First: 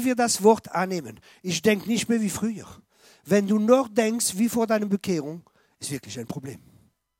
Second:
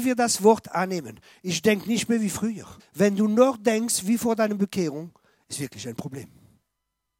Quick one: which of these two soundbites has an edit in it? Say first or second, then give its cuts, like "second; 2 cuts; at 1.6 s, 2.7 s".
second; 1 cut; at 2.8 s